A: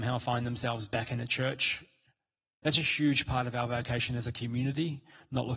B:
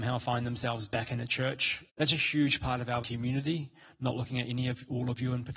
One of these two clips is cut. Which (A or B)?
B